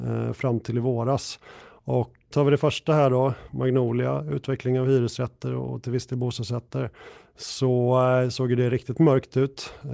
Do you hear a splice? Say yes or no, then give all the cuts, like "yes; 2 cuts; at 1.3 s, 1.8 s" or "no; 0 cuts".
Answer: yes; 1 cut; at 2.3 s